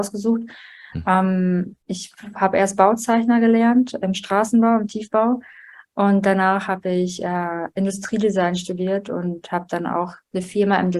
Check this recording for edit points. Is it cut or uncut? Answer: cut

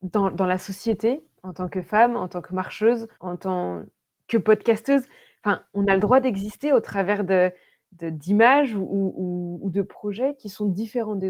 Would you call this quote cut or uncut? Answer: cut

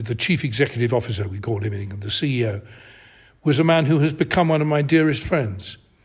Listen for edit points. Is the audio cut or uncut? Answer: uncut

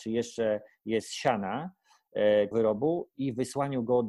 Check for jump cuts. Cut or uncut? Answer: cut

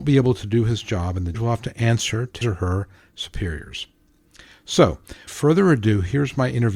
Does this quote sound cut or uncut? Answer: cut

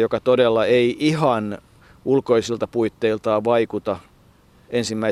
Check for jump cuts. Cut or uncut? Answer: uncut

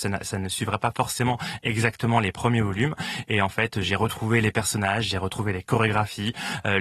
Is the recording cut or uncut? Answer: uncut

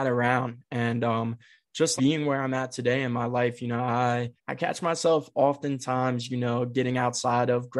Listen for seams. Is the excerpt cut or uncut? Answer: cut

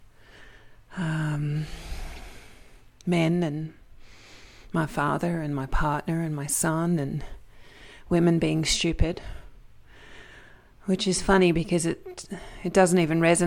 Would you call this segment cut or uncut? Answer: uncut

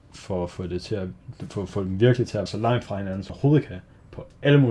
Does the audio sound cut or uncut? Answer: cut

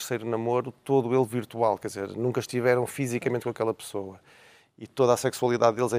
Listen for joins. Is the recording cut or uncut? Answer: uncut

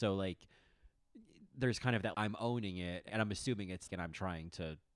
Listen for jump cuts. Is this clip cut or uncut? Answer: cut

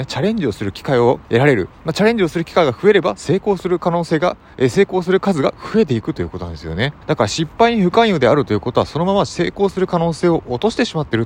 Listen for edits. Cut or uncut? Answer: cut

